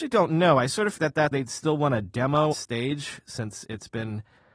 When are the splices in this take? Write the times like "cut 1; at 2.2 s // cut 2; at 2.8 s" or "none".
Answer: cut 1; at 1.0 s // cut 2; at 1.3 s // cut 3; at 2.5 s